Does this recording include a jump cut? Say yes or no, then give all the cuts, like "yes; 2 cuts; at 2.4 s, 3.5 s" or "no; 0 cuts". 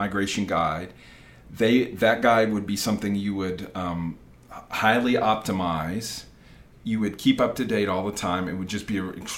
no; 0 cuts